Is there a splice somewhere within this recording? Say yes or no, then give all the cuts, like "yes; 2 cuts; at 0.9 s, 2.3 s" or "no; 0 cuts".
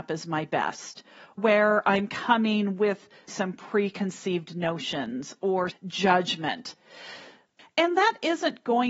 yes; 3 cuts; at 1.4 s, 3.3 s, 5.7 s